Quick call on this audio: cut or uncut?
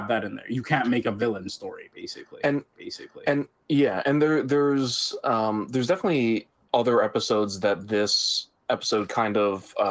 cut